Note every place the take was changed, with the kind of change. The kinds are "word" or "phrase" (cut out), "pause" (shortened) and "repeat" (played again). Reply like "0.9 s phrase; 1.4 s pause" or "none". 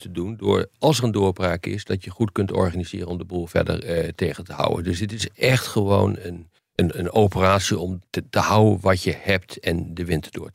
6.6 s pause; 8.1 s pause